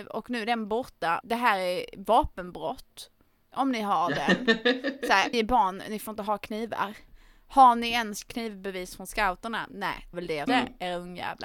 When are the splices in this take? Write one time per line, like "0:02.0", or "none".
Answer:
0:01.2
0:05.3
0:10.1
0:10.5